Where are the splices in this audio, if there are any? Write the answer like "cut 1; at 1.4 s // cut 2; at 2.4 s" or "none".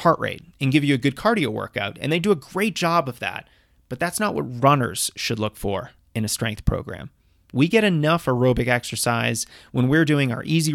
none